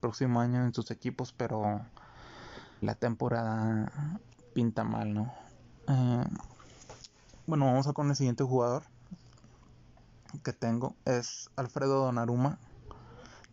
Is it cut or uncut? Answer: cut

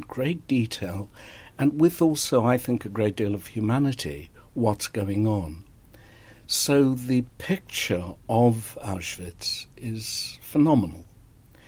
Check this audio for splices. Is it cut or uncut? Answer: uncut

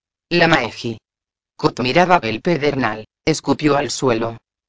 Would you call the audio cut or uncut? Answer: cut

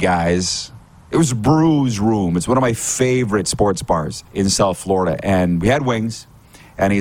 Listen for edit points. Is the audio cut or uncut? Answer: cut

